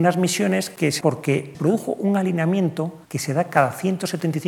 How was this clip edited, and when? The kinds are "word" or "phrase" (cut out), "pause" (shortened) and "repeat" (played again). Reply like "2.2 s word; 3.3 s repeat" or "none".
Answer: 1.0 s word; 1.5 s word; 3.0 s pause